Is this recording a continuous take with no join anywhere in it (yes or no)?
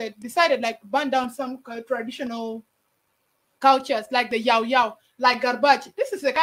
yes